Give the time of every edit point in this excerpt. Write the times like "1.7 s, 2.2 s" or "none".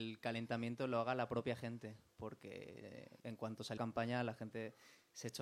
3.2 s, 3.8 s